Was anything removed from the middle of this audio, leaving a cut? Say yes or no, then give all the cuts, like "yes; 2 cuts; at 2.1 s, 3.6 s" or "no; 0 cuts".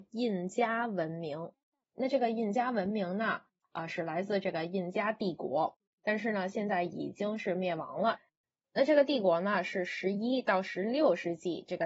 no; 0 cuts